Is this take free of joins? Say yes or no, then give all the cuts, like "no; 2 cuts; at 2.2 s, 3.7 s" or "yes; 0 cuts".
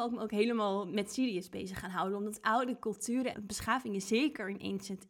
no; 1 cut; at 3.3 s